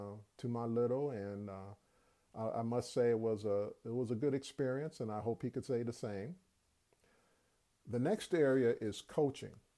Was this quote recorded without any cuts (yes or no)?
yes